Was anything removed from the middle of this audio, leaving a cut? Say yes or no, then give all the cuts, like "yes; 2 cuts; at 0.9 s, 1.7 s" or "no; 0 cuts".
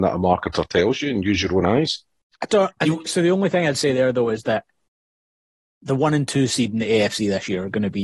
no; 0 cuts